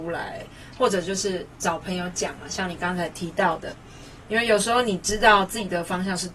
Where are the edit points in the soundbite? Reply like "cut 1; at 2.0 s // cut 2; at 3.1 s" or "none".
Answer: none